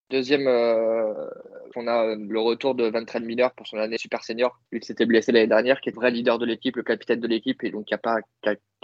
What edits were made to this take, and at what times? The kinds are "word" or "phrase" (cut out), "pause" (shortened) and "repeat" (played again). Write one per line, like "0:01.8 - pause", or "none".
0:01.7 - phrase
0:04.0 - word
0:04.7 - pause
0:05.9 - word